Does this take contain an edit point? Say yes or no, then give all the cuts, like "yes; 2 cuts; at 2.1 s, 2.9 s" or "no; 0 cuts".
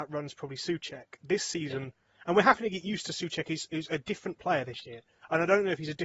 no; 0 cuts